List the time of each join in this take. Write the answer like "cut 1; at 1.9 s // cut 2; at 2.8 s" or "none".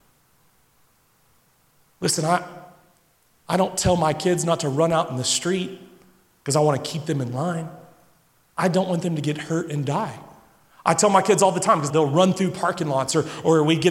cut 1; at 11.9 s